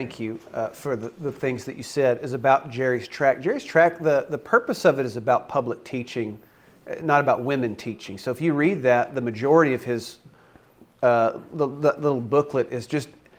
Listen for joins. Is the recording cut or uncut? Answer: uncut